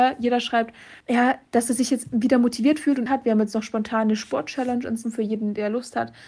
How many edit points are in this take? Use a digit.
3